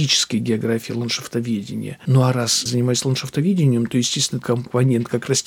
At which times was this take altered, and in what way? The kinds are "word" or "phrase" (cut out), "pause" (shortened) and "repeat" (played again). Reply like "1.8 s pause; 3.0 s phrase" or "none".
2.7 s word; 4.4 s word